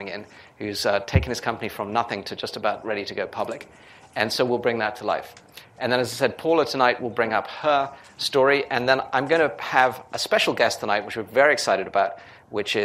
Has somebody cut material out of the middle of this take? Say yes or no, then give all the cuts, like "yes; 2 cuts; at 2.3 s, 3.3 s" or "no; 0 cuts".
no; 0 cuts